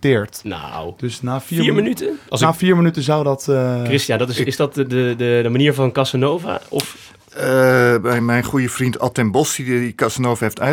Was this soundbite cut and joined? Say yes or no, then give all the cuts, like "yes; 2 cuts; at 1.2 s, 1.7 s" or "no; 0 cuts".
no; 0 cuts